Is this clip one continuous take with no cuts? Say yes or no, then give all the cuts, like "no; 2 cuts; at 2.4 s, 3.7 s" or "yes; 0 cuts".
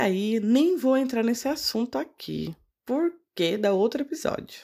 yes; 0 cuts